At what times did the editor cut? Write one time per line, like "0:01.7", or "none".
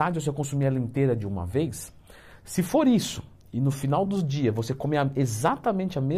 none